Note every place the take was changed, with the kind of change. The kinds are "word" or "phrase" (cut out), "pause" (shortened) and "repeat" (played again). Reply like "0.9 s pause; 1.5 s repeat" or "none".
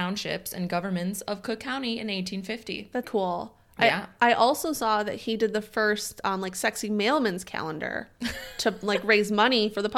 3.0 s word